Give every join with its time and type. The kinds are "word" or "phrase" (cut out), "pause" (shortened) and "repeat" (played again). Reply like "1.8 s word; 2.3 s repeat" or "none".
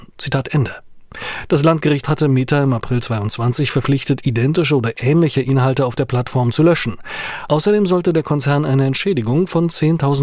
2.0 s word